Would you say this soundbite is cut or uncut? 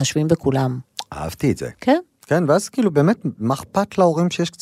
cut